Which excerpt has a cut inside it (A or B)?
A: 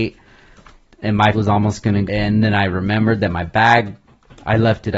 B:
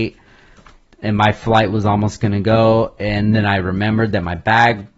A